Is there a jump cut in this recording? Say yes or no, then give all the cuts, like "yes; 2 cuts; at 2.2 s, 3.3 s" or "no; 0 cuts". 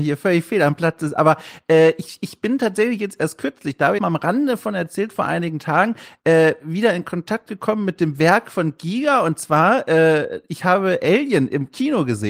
yes; 1 cut; at 4.0 s